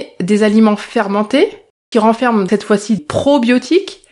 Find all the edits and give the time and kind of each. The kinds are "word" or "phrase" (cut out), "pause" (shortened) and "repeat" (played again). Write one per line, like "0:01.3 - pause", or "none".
0:01.9 - word
0:02.5 - word
0:03.0 - word